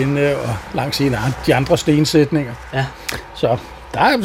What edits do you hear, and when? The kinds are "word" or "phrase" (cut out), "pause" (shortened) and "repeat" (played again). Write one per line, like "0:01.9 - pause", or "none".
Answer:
none